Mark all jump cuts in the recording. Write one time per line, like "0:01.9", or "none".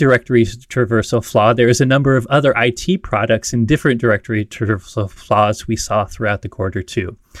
none